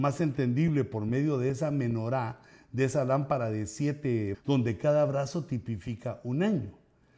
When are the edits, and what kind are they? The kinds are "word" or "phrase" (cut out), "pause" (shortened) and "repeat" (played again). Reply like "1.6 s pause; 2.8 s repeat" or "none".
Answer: 4.3 s word

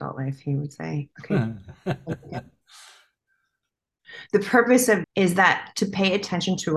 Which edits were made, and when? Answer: 1.1 s word; 5.0 s word

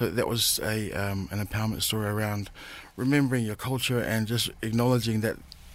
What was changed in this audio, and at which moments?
none

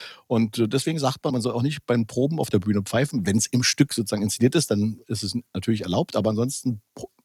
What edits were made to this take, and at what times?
1.3 s word

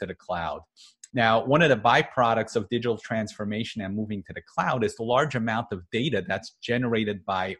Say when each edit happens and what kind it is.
1.1 s pause

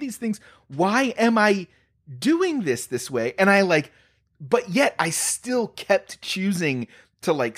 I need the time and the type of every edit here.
none

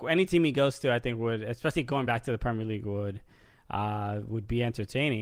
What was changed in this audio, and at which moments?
none

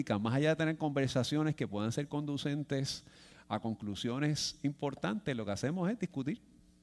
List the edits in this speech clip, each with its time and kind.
none

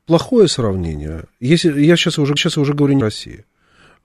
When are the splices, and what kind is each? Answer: 2.4 s repeat; 3.0 s phrase

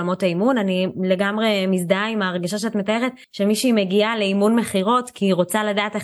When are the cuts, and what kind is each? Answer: 3.2 s pause

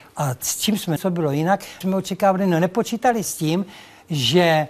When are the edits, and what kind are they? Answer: 1.0 s word; 1.8 s word; 3.2 s word

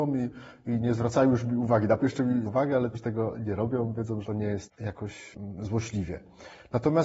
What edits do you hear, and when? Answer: 2.0 s word; 2.4 s word; 2.9 s word; 4.2 s word

